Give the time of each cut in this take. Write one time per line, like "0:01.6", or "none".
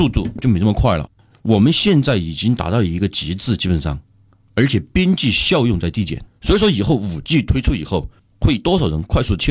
0:06.3